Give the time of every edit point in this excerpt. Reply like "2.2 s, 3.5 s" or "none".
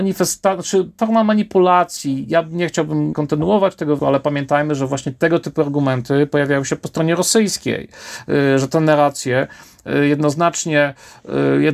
1.0 s, 3.1 s, 4.0 s